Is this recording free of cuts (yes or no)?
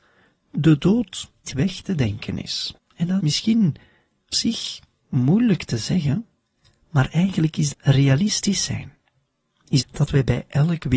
no